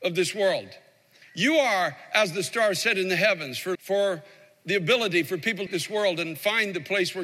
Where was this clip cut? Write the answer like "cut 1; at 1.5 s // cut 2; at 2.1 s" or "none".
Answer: cut 1; at 3.7 s // cut 2; at 5.7 s

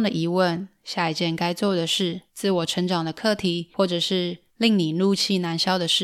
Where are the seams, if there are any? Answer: cut 1; at 2.3 s // cut 2; at 4.5 s

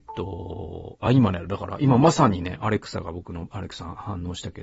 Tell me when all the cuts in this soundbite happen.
none

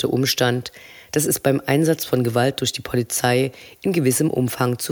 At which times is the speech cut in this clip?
none

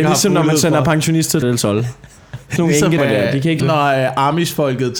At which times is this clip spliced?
cut 1; at 1.4 s // cut 2; at 2.6 s // cut 3; at 3.0 s // cut 4; at 3.6 s

